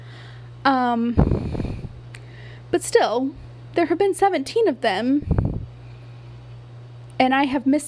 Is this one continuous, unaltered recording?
yes; 0 cuts

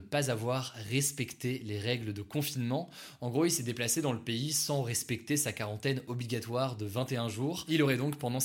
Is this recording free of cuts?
yes; 0 cuts

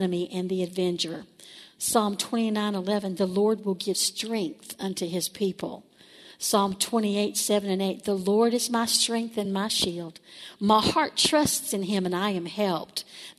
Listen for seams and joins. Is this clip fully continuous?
yes; 0 cuts

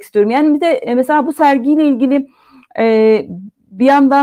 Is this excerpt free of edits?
yes; 0 cuts

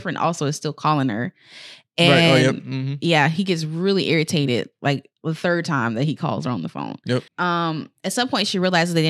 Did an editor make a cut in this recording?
yes; 2 cuts; at 5.1 s, 7.3 s

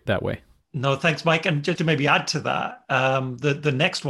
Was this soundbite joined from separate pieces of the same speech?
yes; 1 cut; at 1.8 s

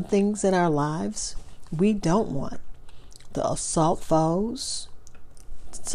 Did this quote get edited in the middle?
yes; 1 cut; at 4.0 s

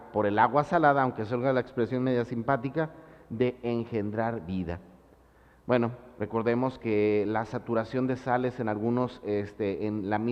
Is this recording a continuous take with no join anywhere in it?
yes; 0 cuts

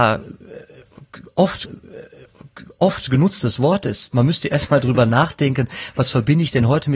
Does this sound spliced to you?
yes; 1 cut; at 1.6 s

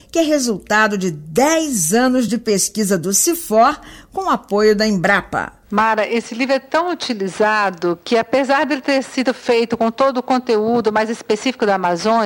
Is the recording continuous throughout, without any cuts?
yes; 0 cuts

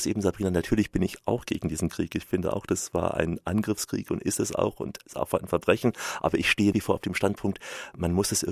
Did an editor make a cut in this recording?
yes; 1 cut; at 6.7 s

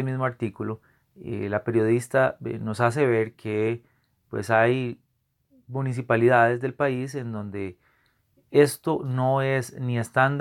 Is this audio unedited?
yes; 0 cuts

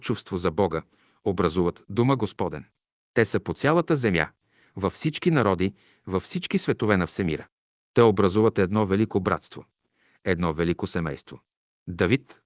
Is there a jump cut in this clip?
no; 0 cuts

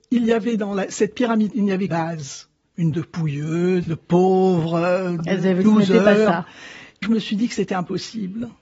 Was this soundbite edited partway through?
yes; 7 cuts; at 1.5 s, 1.9 s, 2.9 s, 3.8 s, 5.2 s, 5.6 s, 7.0 s

